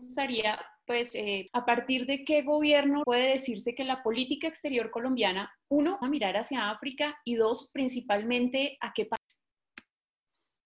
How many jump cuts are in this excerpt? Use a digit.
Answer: 3